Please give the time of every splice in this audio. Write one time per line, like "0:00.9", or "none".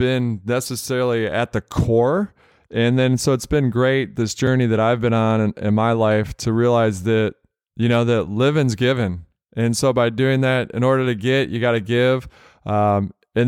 none